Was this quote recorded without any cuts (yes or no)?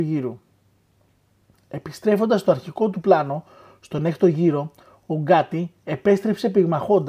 yes